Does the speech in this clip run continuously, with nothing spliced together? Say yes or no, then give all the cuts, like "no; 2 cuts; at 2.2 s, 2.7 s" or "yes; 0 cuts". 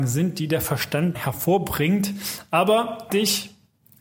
no; 2 cuts; at 1.1 s, 3.1 s